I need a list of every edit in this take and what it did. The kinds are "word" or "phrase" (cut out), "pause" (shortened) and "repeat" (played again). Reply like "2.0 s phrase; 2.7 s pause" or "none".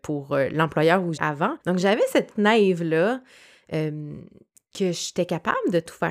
1.2 s word; 1.6 s pause; 2.3 s word